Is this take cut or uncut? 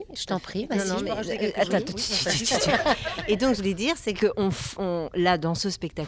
cut